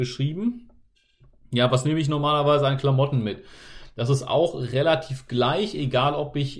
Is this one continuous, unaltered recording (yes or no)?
yes